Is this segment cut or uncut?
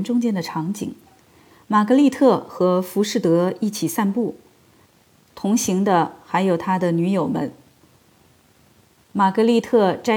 uncut